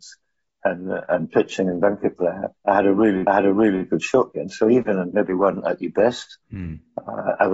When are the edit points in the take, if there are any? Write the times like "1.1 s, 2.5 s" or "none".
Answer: 2.6 s, 3.3 s, 5.1 s, 6.4 s

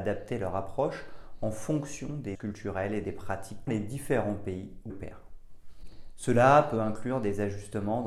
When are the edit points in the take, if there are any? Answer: 2.3 s, 3.7 s, 4.9 s

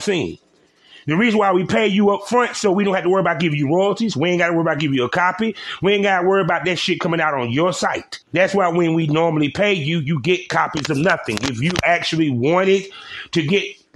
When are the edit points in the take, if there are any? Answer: 8.2 s

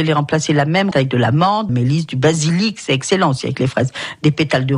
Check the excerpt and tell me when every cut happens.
0.9 s, 1.7 s

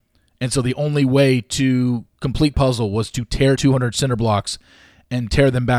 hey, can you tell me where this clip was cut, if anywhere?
2.5 s, 3.6 s

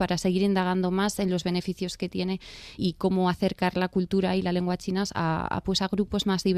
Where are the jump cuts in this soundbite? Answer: 2.8 s

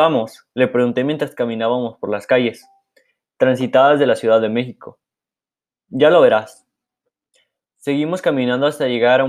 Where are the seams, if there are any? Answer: none

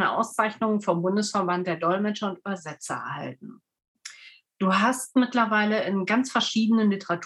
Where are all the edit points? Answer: none

